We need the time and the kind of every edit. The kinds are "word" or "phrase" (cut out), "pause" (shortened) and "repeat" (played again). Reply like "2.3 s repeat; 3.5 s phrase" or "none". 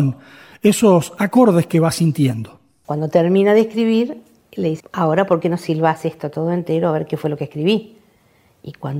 4.8 s word